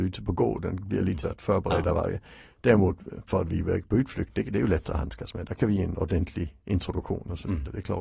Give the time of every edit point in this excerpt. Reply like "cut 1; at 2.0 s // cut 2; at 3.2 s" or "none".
cut 1; at 1.2 s // cut 2; at 3.3 s // cut 3; at 6.6 s